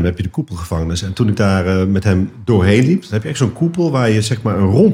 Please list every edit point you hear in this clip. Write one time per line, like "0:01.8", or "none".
none